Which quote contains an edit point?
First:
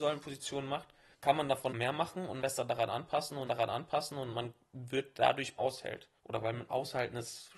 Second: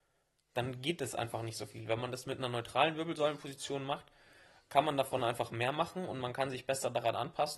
first; 7 cuts; at 1.1 s, 1.7 s, 2.4 s, 3.5 s, 5.6 s, 6.2 s, 6.7 s

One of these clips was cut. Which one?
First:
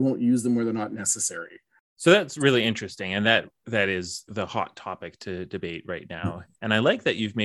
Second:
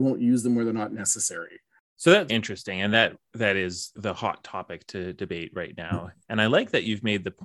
second; 1 cut; at 2.3 s

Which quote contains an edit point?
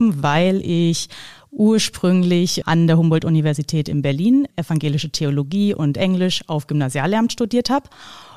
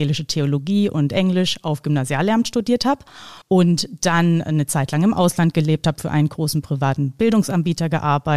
second; 1 cut; at 3.4 s

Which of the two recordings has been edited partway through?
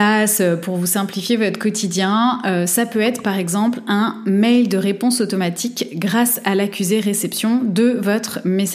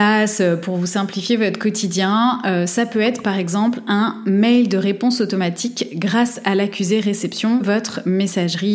second; 1 cut; at 7.6 s

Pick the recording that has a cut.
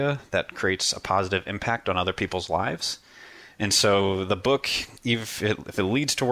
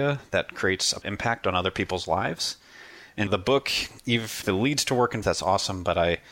second; 4 cuts; at 1.0 s, 3.3 s, 4.4 s, 5.2 s

